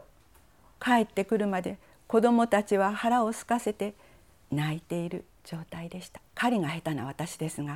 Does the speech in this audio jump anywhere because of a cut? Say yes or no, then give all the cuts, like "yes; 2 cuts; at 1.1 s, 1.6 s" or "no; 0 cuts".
yes; 1 cut; at 6.3 s